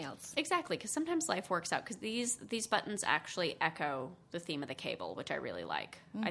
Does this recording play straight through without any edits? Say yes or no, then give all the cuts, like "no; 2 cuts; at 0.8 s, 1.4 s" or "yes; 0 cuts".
yes; 0 cuts